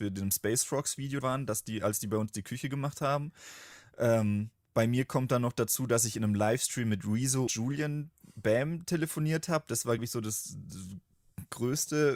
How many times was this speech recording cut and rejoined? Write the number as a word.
three